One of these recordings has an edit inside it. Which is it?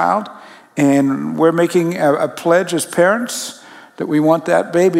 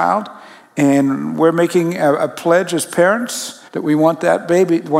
second; 1 cut; at 3.7 s

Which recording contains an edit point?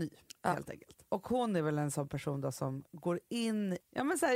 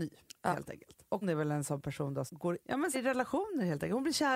second; 4 cuts; at 1.2 s, 2.3 s, 2.6 s, 2.9 s

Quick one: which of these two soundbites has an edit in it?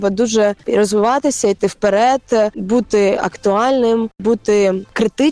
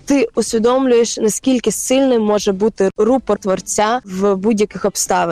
second; 1 cut; at 3.4 s

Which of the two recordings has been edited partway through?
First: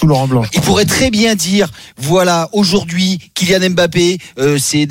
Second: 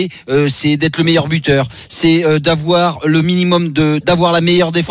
second; 1 cut; at 4.0 s

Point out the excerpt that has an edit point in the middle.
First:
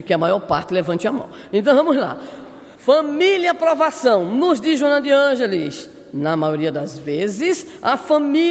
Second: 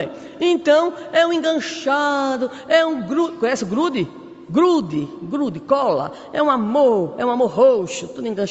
first; 1 cut; at 2.8 s

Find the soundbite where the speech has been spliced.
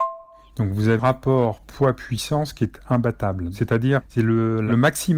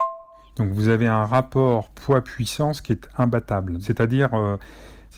first; 2 cuts; at 1.0 s, 4.0 s

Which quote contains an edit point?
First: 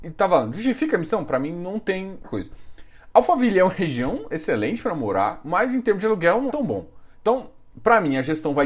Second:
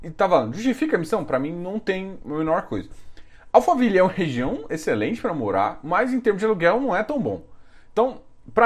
first; 3 cuts; at 2.2 s, 6.5 s, 7.1 s

